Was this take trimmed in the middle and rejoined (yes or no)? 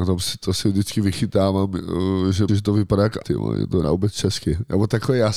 yes